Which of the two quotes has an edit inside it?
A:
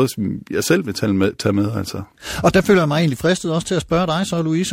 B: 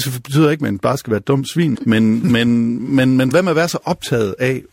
B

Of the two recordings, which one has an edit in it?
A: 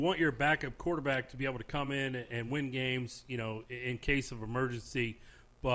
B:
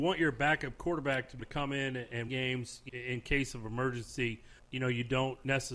B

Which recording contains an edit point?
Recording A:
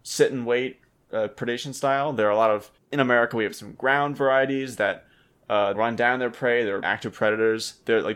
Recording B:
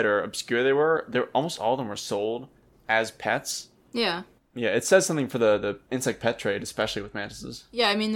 A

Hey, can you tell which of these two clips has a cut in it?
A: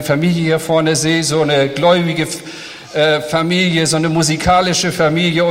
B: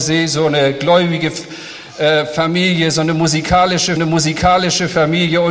B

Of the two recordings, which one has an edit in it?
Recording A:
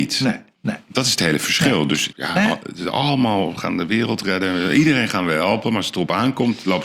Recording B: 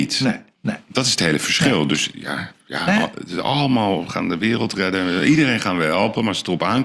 A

